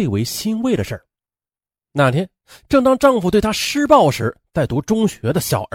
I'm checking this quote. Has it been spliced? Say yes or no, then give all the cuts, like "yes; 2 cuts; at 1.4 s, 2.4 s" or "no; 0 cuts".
no; 0 cuts